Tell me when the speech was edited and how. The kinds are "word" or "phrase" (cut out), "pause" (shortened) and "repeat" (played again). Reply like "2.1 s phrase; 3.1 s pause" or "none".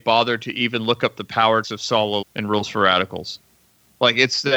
1.6 s word; 2.2 s word